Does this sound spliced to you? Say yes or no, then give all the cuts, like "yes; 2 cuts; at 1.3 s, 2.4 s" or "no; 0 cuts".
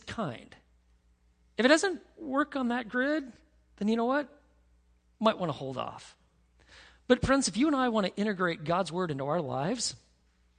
no; 0 cuts